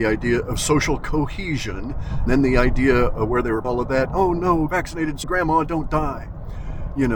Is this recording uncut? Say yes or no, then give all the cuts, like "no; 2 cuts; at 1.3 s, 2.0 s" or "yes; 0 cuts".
no; 4 cuts; at 2.3 s, 3.6 s, 4.7 s, 5.2 s